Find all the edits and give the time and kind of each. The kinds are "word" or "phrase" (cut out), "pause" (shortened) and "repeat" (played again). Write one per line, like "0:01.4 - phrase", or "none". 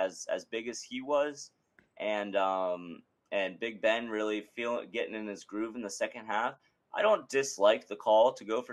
none